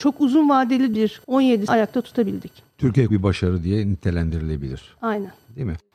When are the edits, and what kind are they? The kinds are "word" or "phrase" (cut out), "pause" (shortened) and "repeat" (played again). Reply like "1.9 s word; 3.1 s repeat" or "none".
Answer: 0.9 s word; 1.2 s phrase; 1.7 s word; 3.1 s phrase

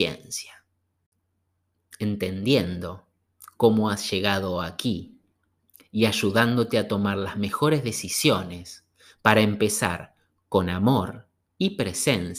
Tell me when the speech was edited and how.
none

